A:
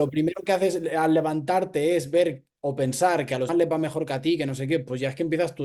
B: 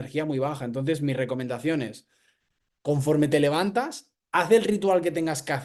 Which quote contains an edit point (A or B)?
A